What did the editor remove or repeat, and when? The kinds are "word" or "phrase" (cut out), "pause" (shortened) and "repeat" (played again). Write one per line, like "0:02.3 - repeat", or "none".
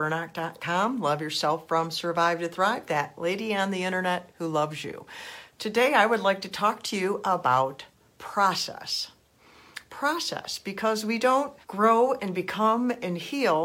0:08.1 - pause
0:11.6 - pause